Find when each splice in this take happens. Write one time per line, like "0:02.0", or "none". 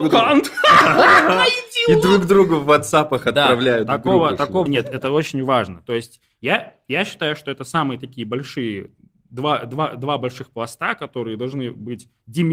0:04.7